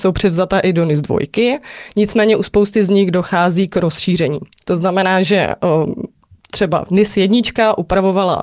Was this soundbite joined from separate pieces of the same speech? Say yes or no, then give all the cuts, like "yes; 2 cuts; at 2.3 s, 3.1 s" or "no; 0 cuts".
no; 0 cuts